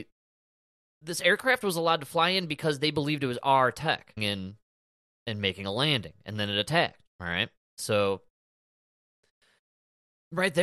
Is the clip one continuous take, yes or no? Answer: no